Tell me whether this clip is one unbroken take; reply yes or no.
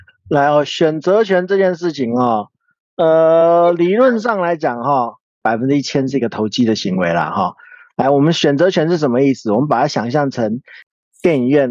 yes